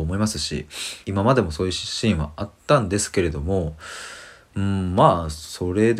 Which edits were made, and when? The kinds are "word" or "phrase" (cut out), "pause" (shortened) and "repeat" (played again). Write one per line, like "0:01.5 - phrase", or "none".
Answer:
0:01.0 - pause